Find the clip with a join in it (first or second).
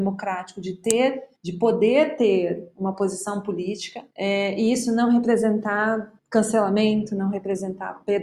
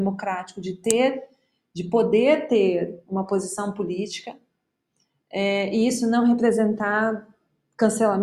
first